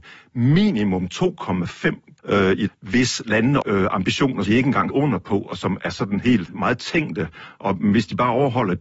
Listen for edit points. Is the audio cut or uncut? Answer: cut